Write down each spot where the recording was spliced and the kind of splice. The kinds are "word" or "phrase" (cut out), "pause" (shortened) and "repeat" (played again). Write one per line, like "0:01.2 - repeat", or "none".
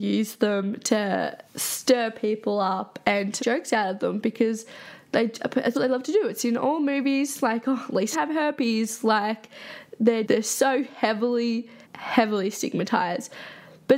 0:01.5 - pause
0:03.4 - word
0:05.7 - word
0:08.1 - word
0:10.2 - word
0:11.8 - pause

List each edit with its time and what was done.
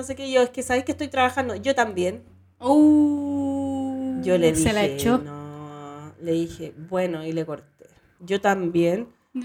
none

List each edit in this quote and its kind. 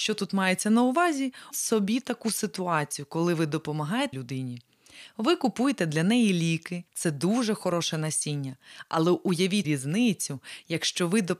0:01.5 - word
0:04.1 - phrase
0:06.9 - pause
0:09.6 - word

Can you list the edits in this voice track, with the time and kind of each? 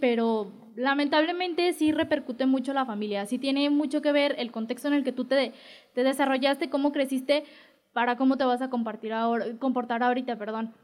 none

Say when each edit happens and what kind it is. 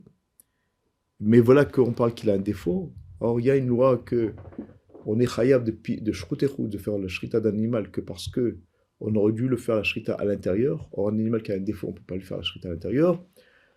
none

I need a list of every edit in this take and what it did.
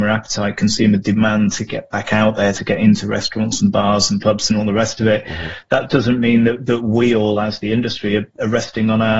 none

